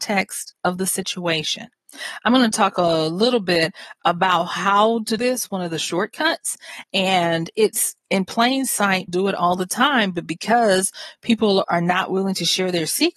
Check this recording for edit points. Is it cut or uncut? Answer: cut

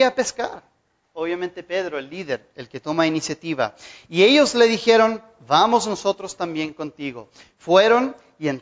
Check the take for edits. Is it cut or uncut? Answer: uncut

